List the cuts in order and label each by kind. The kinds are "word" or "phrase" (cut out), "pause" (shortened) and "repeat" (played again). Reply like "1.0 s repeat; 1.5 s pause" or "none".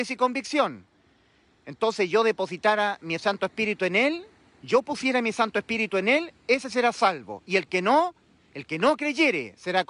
none

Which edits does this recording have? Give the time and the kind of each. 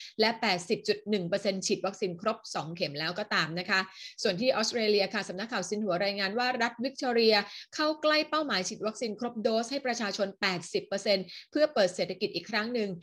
none

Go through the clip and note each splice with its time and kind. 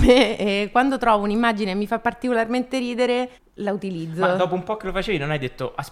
3.3 s pause

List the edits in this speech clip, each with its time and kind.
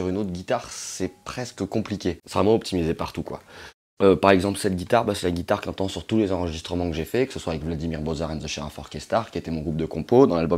none

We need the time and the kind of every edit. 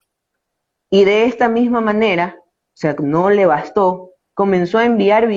2.6 s pause

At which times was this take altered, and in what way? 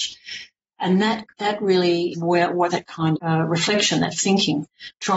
1.3 s pause; 2.1 s word; 2.7 s word; 3.1 s word; 4.1 s word

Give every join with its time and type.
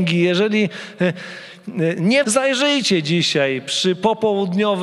2.2 s word

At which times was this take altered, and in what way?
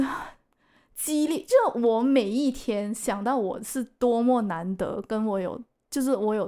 none

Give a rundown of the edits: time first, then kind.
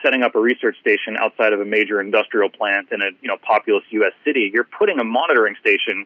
none

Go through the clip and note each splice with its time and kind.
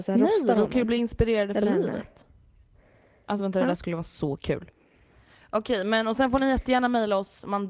none

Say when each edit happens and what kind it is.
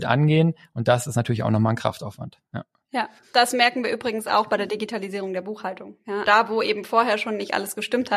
6.2 s word

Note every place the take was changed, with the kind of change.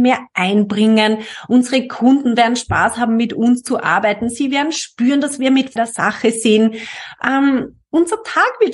5.8 s phrase

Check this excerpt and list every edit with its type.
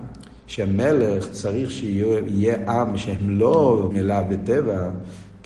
3.9 s word

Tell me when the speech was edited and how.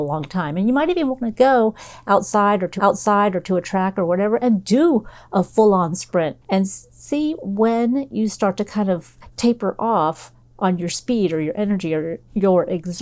2.8 s repeat; 6.4 s pause

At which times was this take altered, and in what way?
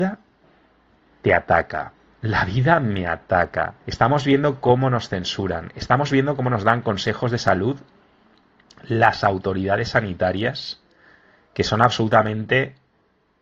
3.8 s pause

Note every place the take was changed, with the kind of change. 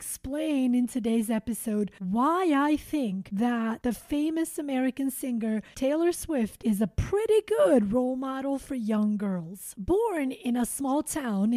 none

